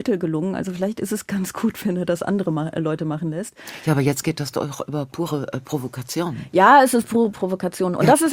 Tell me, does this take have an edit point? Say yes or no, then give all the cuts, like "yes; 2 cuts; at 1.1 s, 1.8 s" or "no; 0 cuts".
no; 0 cuts